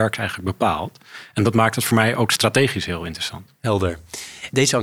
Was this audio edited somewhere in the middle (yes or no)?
no